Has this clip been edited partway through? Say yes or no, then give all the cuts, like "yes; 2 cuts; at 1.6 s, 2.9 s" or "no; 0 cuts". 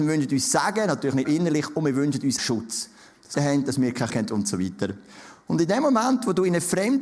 yes; 4 cuts; at 1.2 s, 2.4 s, 3.3 s, 4.1 s